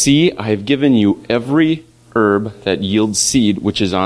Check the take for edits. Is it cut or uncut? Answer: uncut